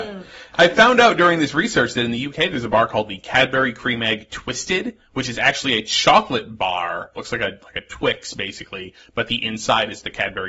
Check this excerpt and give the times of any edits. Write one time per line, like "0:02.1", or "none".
none